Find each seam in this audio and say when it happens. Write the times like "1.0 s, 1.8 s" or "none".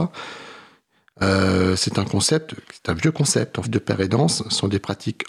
3.6 s